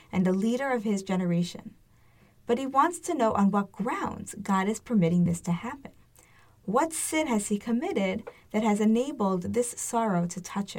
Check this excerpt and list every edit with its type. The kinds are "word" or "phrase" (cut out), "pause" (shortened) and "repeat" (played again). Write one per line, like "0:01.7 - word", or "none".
none

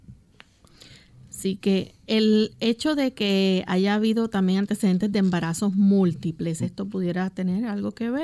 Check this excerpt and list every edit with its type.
none

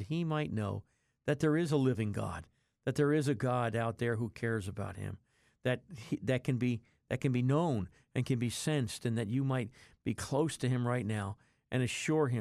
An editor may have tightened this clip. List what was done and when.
none

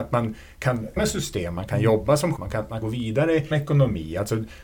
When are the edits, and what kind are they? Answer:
0:01.0 - word
0:02.4 - word
0:02.8 - word
0:03.5 - word

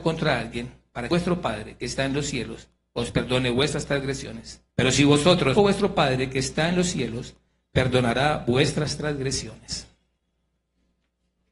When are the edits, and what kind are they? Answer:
0:01.1 - phrase
0:04.7 - pause
0:05.6 - phrase

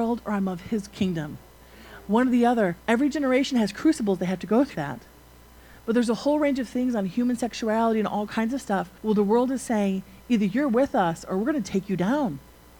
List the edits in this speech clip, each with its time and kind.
0:02.8 - pause
0:04.7 - word
0:09.0 - pause

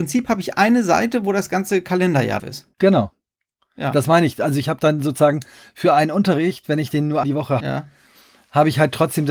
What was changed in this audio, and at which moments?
0:02.4 - word
0:02.7 - pause
0:07.2 - word
0:07.6 - word

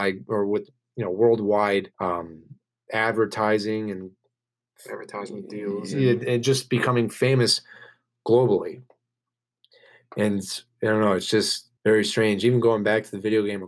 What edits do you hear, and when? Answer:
0:01.9 - pause
0:11.8 - pause

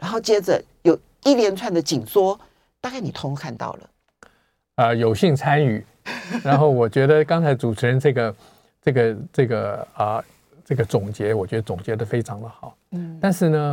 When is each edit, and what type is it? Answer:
none

